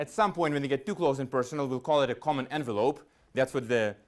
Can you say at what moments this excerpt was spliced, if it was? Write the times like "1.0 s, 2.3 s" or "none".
none